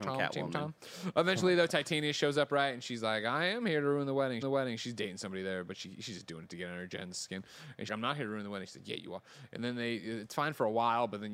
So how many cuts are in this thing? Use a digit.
2